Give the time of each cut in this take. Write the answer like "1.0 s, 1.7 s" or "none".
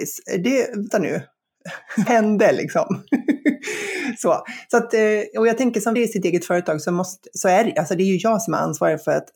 0.9 s, 2.1 s, 6.0 s